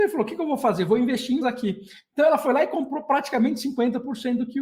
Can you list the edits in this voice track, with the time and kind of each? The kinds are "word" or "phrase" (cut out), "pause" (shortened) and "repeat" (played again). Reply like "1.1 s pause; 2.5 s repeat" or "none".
1.4 s word